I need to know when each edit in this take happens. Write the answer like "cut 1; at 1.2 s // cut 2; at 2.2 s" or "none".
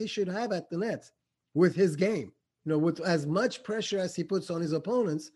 cut 1; at 2.5 s